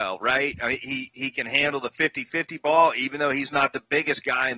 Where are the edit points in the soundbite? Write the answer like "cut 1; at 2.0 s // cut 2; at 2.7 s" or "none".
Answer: none